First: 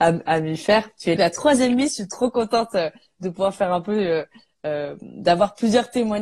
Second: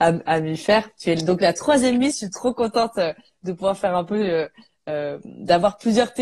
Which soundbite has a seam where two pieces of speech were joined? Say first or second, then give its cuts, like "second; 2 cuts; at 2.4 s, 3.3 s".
first; 1 cut; at 1.2 s